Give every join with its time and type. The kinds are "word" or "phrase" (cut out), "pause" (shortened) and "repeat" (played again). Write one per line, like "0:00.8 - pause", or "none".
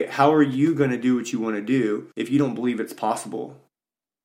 0:02.1 - pause

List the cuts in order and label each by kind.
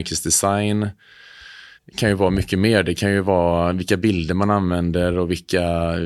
0:01.8 - pause

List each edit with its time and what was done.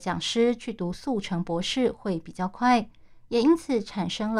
none

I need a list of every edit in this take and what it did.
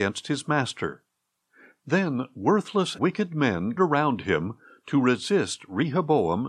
0:03.0 - word
0:03.8 - word

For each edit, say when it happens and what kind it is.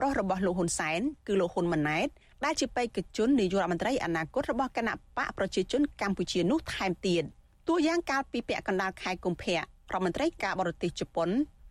none

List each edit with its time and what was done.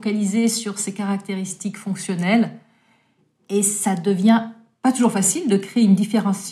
none

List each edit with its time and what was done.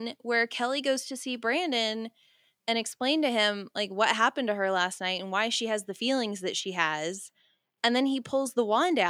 none

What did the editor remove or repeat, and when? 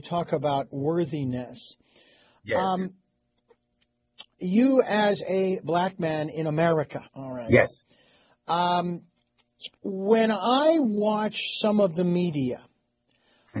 0:07.1 - pause
0:09.8 - pause

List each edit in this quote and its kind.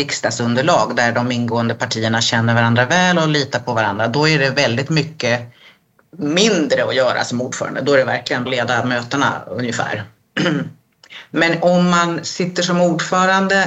0:08.5 - word

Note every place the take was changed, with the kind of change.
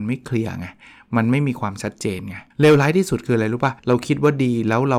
0:02.5 - pause
0:03.8 - pause

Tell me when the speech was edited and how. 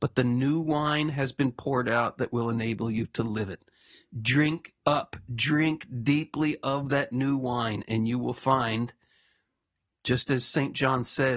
0:04.8 - pause

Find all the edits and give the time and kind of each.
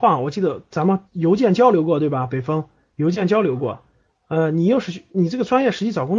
0:01.1 - pause
0:04.1 - pause

